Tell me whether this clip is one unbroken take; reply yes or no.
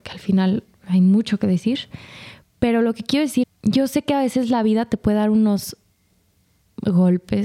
no